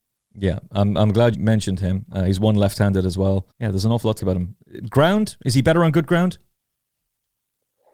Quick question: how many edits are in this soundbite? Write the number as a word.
three